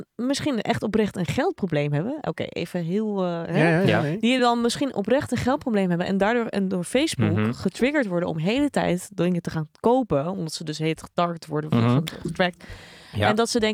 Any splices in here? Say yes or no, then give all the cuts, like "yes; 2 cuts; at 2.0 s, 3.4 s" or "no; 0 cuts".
no; 0 cuts